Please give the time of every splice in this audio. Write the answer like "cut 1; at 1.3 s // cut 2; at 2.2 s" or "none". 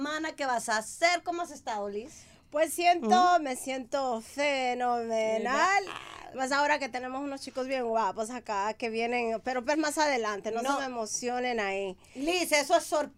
cut 1; at 2.7 s // cut 2; at 9.7 s